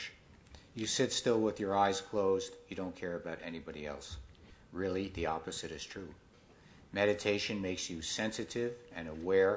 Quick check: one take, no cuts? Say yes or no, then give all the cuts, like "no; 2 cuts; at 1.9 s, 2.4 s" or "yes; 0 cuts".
yes; 0 cuts